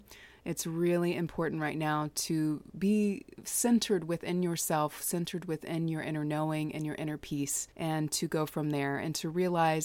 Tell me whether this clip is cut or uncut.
cut